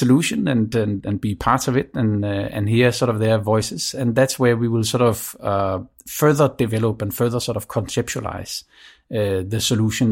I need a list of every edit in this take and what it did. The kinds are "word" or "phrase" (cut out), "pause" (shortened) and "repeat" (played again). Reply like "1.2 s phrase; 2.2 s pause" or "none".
none